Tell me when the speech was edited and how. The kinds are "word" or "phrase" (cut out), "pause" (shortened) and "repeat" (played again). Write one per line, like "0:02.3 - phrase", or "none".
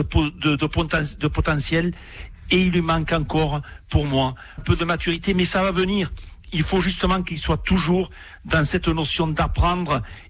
0:04.6 - word

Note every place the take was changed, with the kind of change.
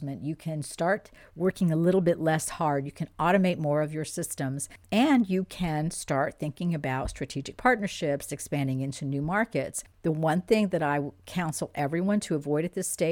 0:04.8 - pause
0:09.9 - pause

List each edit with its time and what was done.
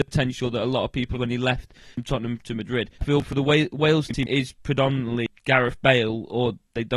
0:01.1 - word
0:02.9 - pause
0:05.4 - pause

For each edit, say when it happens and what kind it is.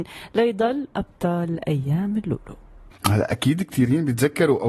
0:00.9 - phrase
0:02.9 - pause

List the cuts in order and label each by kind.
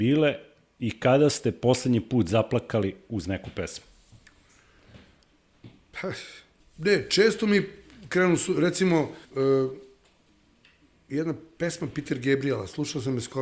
0:06.6 - pause
0:09.2 - pause

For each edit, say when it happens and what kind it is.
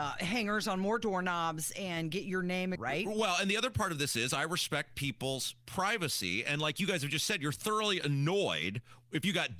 0:02.8 - phrase

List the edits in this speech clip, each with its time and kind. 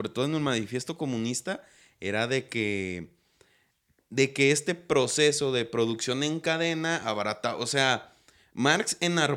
none

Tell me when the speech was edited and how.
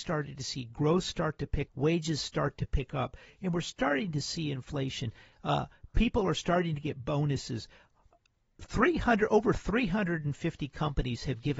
0:01.7 - word

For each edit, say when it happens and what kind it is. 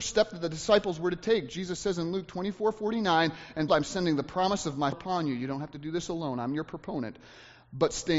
0:03.7 - word
0:04.9 - word

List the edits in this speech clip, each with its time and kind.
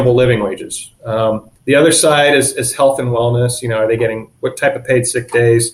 0:01.6 - pause

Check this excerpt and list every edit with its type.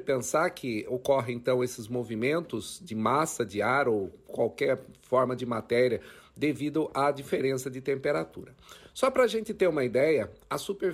none

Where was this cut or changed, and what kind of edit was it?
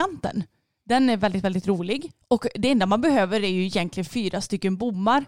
none

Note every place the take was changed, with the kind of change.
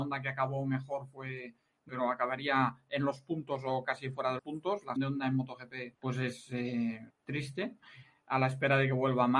0:01.9 - phrase
0:04.4 - word
0:05.0 - word
0:05.9 - pause
0:07.1 - word

